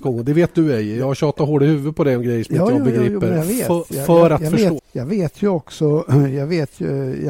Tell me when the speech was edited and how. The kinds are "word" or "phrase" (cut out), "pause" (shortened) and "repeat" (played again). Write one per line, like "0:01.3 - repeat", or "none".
0:04.8 - word